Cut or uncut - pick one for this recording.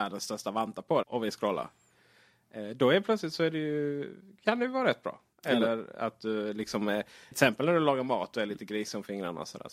cut